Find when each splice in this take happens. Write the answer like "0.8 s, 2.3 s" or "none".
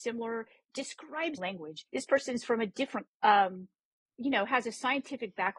1.4 s, 1.9 s, 3.1 s, 4.1 s

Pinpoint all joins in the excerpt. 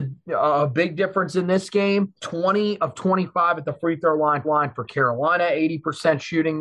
2.2 s, 4.4 s

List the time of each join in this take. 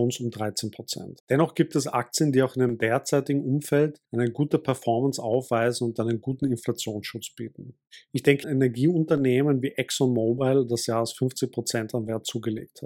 1.2 s, 4.0 s, 8.4 s, 10.9 s

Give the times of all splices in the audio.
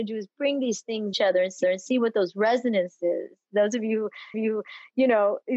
1.1 s, 1.6 s, 4.3 s

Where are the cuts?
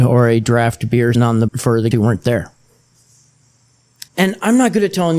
1.1 s, 1.5 s, 1.9 s, 4.1 s

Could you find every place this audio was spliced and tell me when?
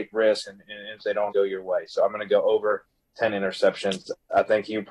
1.0 s, 1.3 s

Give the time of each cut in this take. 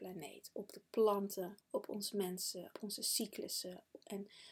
1.6 s, 2.7 s

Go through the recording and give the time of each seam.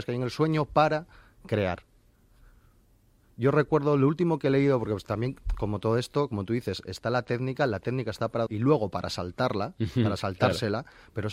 8.5 s

